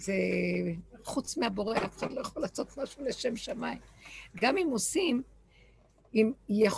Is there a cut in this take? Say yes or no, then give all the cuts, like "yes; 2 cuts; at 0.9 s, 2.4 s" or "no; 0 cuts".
no; 0 cuts